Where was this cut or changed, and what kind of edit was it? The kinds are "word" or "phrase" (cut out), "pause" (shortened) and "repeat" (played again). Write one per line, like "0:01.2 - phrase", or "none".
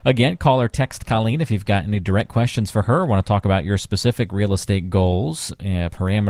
none